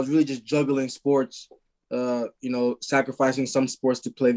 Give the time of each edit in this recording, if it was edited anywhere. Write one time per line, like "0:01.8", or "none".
none